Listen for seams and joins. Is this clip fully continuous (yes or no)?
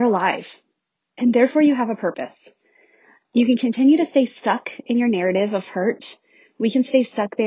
yes